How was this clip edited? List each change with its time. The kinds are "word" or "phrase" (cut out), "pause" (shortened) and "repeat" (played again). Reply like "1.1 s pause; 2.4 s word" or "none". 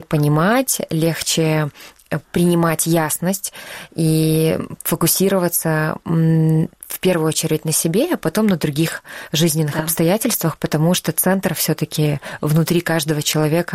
2.2 s pause